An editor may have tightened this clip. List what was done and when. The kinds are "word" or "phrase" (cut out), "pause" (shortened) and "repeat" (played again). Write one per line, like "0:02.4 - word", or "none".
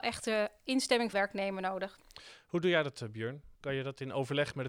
0:01.1 - word
0:03.6 - pause